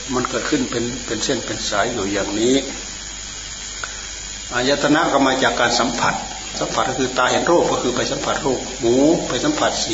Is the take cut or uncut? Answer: cut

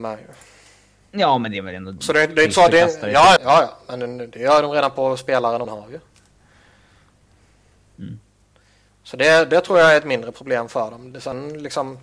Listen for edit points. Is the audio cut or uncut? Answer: cut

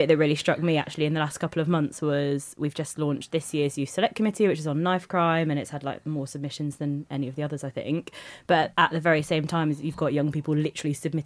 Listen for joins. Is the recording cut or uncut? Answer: uncut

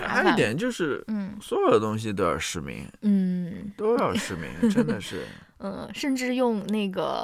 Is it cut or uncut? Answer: uncut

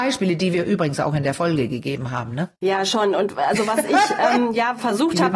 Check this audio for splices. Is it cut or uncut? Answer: cut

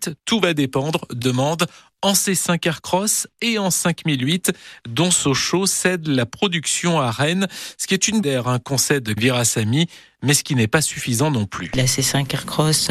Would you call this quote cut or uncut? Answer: cut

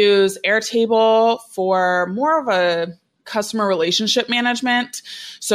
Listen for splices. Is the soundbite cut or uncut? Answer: uncut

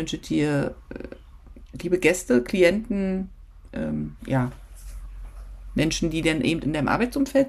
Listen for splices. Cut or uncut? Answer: uncut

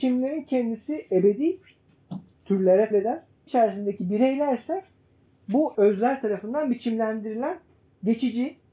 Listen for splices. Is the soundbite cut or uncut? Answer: cut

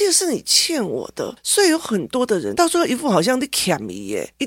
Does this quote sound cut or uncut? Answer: cut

